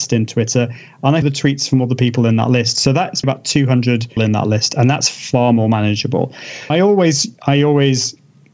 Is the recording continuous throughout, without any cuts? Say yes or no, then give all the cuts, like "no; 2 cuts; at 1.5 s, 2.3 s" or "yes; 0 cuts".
no; 4 cuts; at 1.2 s, 3.2 s, 4.2 s, 6.7 s